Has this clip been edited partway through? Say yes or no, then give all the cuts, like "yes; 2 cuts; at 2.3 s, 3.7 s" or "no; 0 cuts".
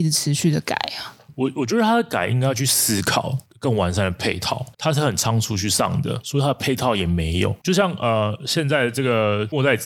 yes; 1 cut; at 4.7 s